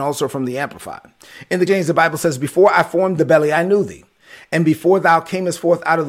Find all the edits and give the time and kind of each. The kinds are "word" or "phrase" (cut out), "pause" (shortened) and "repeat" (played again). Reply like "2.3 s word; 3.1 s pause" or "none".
1.7 s word; 3.2 s phrase